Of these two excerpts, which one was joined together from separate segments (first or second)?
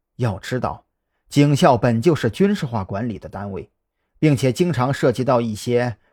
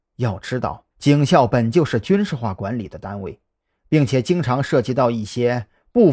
second